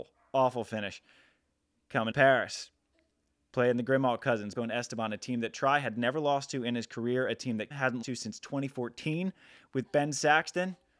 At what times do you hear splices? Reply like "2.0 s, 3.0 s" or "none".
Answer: 2.1 s, 4.6 s, 7.7 s, 8.0 s